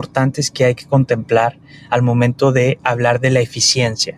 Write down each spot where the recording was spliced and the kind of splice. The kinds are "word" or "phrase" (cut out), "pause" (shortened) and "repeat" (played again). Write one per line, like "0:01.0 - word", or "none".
none